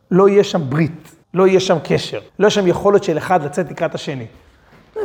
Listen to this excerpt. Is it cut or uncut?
cut